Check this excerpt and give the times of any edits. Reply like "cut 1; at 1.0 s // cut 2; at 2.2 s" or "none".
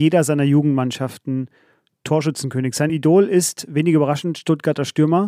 none